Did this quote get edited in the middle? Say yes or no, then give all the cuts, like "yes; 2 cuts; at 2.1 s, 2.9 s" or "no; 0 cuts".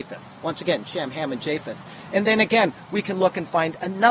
no; 0 cuts